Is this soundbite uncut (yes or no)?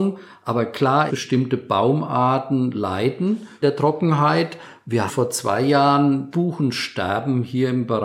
no